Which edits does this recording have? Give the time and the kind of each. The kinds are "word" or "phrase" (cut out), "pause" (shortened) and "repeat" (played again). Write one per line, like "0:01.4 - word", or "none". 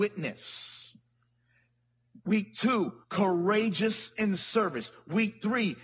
0:03.0 - pause